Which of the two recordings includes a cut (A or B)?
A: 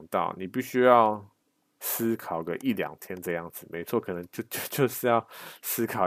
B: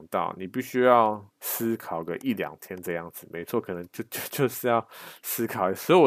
B